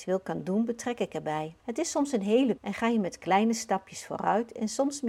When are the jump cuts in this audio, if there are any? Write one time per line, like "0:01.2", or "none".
0:01.6
0:02.6